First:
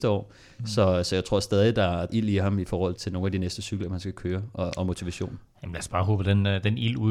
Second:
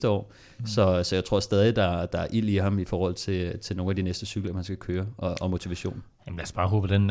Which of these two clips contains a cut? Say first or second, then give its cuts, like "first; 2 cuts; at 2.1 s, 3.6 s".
first; 2 cuts; at 2.1 s, 3.0 s